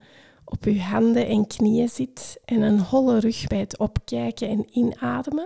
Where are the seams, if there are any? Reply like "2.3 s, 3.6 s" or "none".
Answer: 3.5 s